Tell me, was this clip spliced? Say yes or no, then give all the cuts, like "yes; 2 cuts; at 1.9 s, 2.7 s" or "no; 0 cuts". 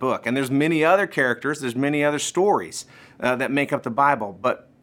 no; 0 cuts